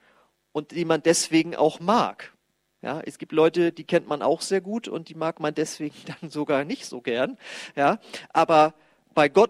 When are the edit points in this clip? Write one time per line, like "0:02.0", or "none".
none